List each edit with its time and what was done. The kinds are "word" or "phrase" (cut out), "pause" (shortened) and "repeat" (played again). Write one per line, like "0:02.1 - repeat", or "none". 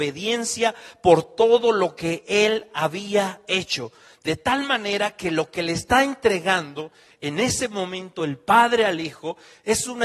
none